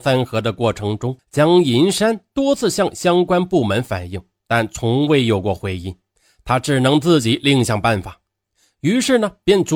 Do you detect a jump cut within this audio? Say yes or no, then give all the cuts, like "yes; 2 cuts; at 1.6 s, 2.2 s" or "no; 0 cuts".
yes; 1 cut; at 1.2 s